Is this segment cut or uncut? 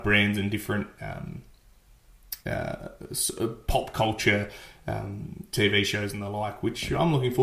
cut